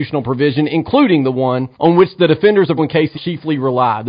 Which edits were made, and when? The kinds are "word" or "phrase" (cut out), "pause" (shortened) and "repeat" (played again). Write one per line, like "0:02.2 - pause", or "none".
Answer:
0:01.7 - pause
0:02.8 - word
0:03.1 - word